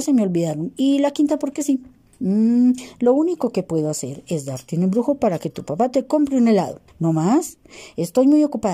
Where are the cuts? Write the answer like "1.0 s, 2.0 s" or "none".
6.9 s